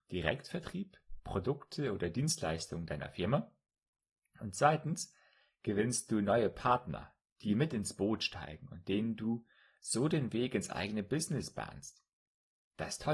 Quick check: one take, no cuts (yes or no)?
yes